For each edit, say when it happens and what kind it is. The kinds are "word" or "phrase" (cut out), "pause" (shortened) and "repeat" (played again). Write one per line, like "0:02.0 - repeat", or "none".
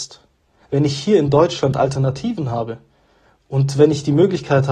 none